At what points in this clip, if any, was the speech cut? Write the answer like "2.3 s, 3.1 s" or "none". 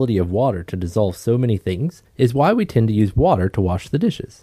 2.1 s

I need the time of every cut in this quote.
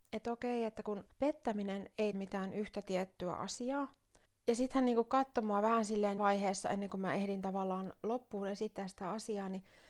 1.1 s, 2.1 s, 4.3 s, 6.2 s

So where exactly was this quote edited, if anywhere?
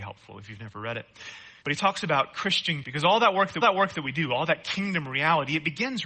1.6 s, 2.8 s, 3.6 s

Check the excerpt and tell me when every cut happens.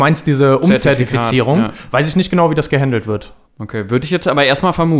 3.5 s

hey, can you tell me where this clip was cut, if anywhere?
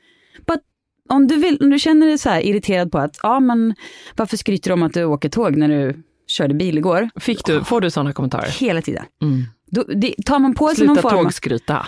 none

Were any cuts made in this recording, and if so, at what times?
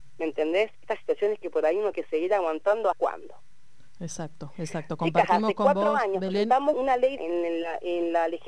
1.9 s, 2.9 s, 6.7 s, 7.2 s

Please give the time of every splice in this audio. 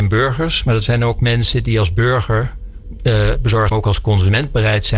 3.7 s

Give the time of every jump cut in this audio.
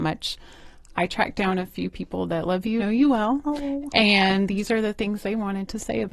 2.8 s

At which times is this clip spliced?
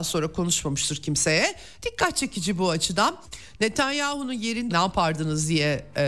4.7 s

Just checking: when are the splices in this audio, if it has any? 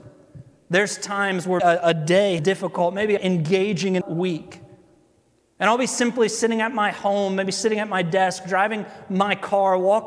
1.6 s, 2.4 s, 3.2 s, 4.0 s

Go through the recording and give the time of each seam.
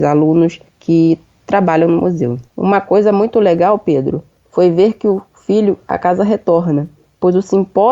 2.5 s

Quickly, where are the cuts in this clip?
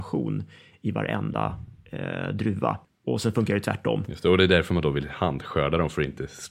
2.8 s

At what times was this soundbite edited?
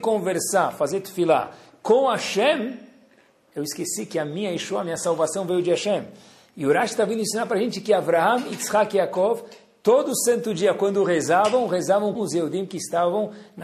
12.2 s

